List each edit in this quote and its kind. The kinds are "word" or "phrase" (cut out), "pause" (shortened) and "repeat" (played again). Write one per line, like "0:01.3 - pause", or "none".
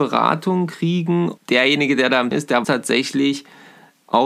0:01.4 - word
0:02.3 - word
0:02.6 - word